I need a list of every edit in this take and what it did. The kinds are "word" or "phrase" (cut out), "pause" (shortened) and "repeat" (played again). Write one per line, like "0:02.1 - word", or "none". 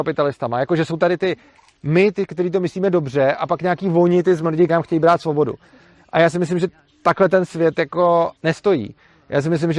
0:04.7 - word
0:08.4 - pause